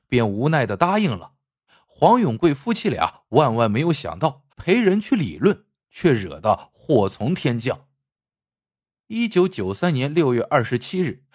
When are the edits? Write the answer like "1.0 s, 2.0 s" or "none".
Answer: 1.7 s, 4.5 s, 8.1 s